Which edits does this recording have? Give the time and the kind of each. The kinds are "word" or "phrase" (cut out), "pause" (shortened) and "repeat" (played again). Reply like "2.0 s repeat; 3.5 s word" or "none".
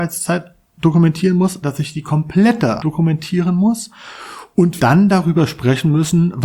1.6 s word; 2.8 s word; 4.8 s word